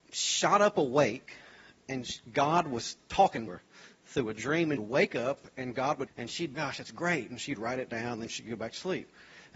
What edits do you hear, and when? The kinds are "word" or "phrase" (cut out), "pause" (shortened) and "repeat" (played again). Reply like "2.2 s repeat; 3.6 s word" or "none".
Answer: 3.5 s word; 4.8 s phrase; 6.1 s phrase; 6.5 s phrase

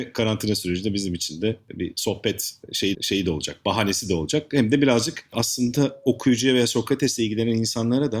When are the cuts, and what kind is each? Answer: 2.9 s repeat

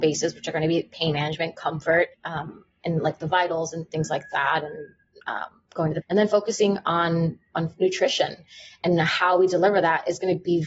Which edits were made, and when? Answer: 2.1 s pause; 5.7 s pause; 6.0 s word

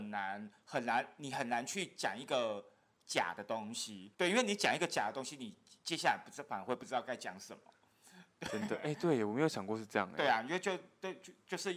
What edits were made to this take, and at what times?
4.1 s pause

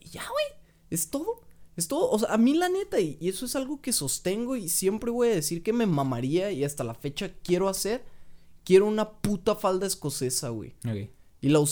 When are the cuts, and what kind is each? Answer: none

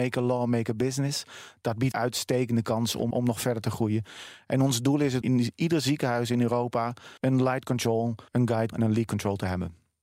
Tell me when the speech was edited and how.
1.9 s phrase; 3.1 s word; 5.2 s word; 7.2 s pause; 8.3 s pause; 8.7 s word

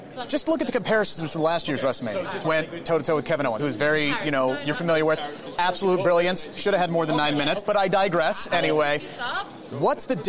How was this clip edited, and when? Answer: 2.4 s word; 3.6 s word; 4.7 s word

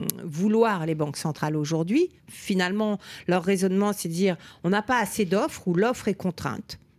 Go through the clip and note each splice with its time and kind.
none

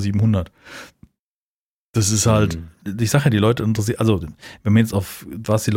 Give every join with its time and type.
4.2 s word

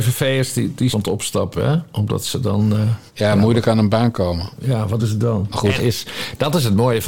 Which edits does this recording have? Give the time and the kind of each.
0.9 s phrase; 3.1 s pause; 5.0 s word; 5.8 s word

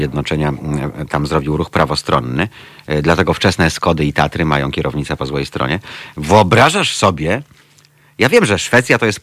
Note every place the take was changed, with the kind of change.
none

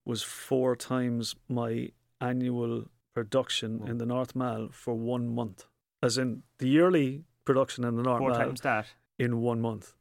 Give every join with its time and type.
none

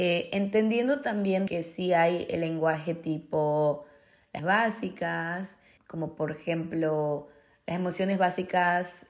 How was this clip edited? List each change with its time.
1.5 s word; 4.4 s word; 5.8 s word

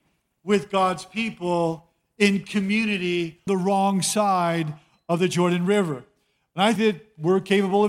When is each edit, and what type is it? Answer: 3.5 s word; 6.8 s word

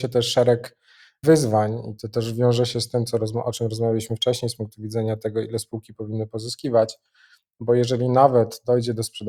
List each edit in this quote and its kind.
none

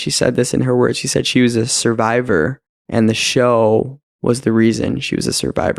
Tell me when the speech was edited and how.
2.7 s pause; 4.1 s pause

